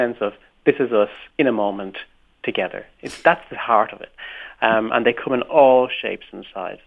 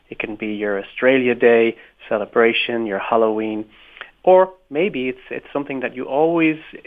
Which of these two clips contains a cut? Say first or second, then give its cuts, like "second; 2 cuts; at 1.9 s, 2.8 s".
first; 1 cut; at 1.3 s